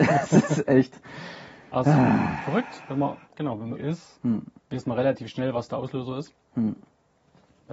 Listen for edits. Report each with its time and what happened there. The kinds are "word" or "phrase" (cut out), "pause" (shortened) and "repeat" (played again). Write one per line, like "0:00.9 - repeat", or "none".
0:03.2 - pause
0:03.7 - phrase
0:04.6 - pause